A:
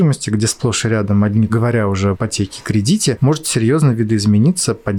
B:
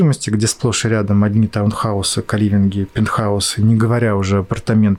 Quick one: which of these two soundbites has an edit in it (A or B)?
A